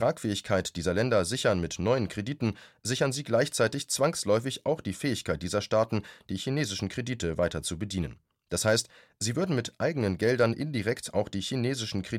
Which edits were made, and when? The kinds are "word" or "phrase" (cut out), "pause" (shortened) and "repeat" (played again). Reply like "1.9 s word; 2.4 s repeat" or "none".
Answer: none